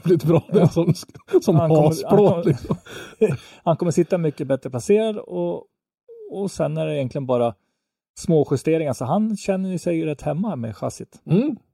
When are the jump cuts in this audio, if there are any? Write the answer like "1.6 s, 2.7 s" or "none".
none

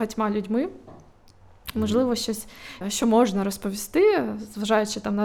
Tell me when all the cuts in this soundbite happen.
2.8 s

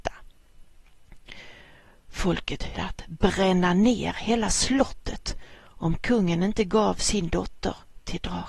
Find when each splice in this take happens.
2.7 s, 5.6 s

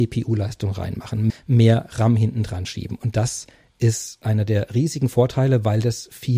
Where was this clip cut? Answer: 1.3 s

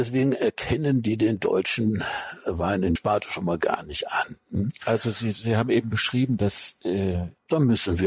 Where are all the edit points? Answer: 3.0 s

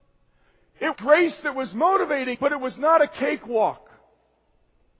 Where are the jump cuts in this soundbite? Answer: 0.9 s, 2.3 s

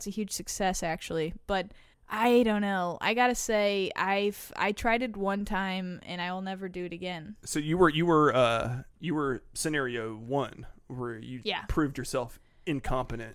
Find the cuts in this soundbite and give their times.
1.9 s, 8.9 s, 11.4 s

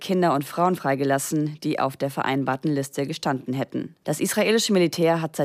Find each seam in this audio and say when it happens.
4.0 s

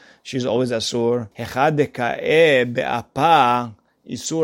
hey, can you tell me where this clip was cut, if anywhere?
1.3 s

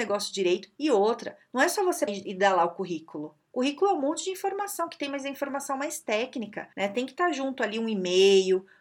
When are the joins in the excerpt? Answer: 2.1 s, 6.7 s

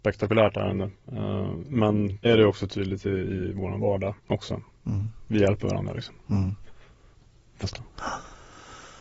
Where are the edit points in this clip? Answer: 1.0 s, 2.2 s, 4.2 s, 7.6 s

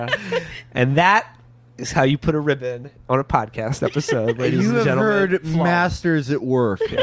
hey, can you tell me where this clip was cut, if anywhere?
none

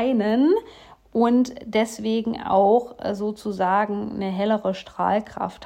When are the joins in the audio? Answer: none

